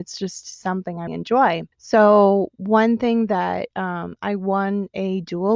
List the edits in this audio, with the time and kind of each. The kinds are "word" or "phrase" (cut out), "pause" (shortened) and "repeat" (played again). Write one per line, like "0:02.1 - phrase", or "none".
0:01.1 - word
0:01.7 - pause